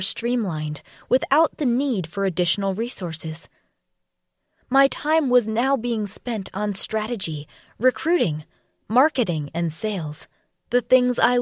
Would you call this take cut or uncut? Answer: uncut